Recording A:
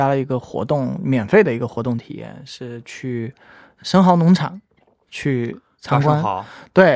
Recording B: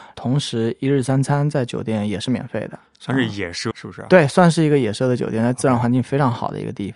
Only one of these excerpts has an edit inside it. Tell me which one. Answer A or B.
B